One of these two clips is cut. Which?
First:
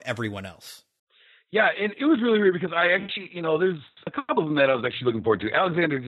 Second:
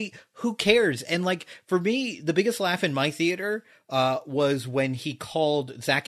first; 1 cut; at 1.0 s

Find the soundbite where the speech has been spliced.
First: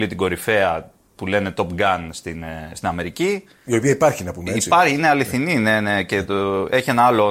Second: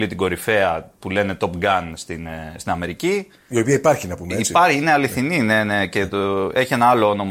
second; 1 cut; at 1.0 s

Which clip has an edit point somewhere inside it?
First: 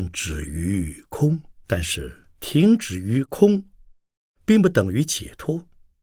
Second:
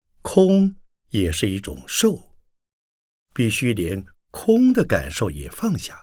first; 2 cuts; at 1.6 s, 2.3 s

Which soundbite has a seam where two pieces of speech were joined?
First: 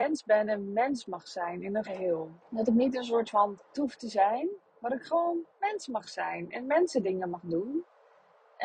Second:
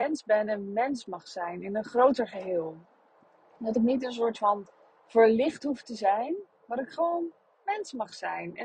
first; 4 cuts; at 1.8 s, 2.4 s, 3.7 s, 5.5 s

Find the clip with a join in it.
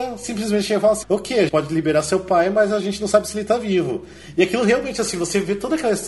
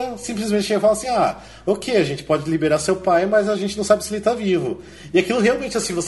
first; 2 cuts; at 1.0 s, 1.5 s

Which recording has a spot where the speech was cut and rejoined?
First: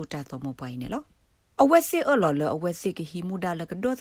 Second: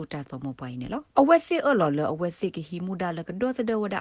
second; 1 cut; at 1.1 s

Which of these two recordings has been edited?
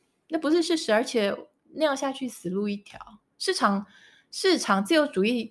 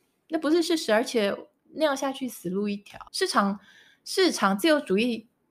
second; 1 cut; at 3.1 s

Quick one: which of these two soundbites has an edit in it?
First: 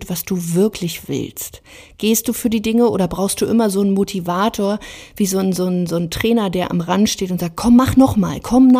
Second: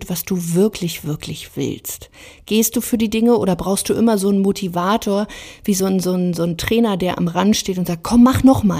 first; 1 cut; at 1.0 s

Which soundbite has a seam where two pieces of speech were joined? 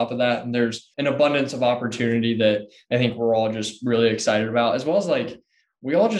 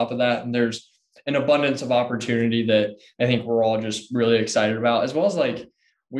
first; 1 cut; at 0.9 s

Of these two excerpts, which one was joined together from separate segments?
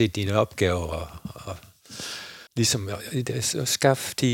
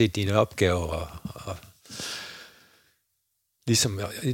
first; 1 cut; at 2.5 s

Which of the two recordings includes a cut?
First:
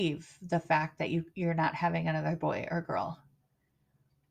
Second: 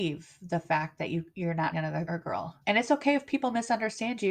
second; 3 cuts; at 1.7 s, 2.1 s, 2.6 s

